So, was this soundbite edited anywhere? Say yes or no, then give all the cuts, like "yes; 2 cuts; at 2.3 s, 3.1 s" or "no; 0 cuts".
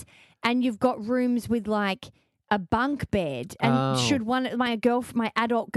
no; 0 cuts